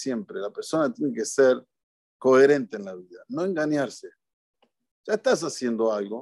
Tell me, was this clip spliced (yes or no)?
no